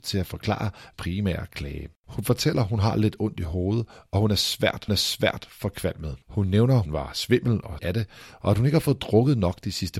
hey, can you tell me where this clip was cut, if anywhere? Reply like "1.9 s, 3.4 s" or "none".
0.9 s, 2.0 s, 4.9 s, 6.2 s, 6.9 s, 7.8 s